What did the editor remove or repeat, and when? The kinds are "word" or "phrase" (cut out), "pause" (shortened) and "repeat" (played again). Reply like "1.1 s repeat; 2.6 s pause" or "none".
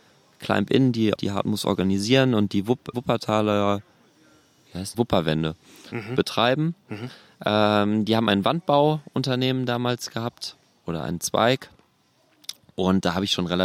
1.2 s word; 2.9 s word; 4.9 s word

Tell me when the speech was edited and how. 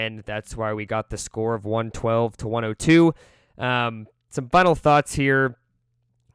none

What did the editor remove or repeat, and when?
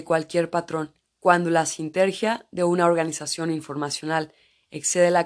1.0 s pause

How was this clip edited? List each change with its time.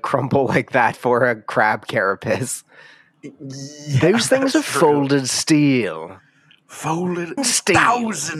0.9 s word; 7.4 s word

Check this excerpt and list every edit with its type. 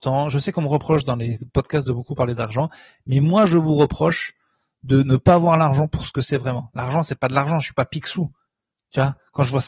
none

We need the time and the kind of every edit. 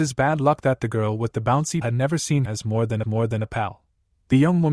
1.8 s word; 2.5 s word; 3.0 s repeat

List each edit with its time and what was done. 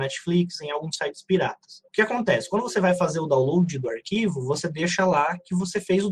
1.9 s pause

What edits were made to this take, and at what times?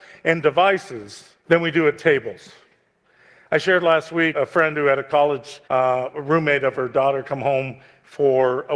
1.4 s pause; 4.3 s word; 5.6 s pause

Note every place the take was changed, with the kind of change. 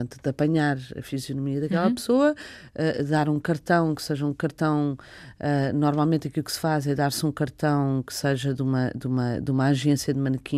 none

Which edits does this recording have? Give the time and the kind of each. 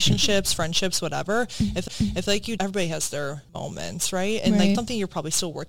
1.9 s repeat; 2.6 s word; 3.5 s pause; 4.8 s word

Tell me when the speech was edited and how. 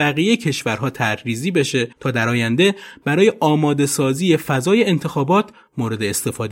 1.9 s pause

